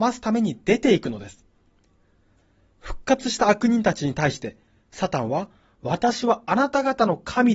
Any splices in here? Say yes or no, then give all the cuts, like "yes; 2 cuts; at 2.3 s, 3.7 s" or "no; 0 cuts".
no; 0 cuts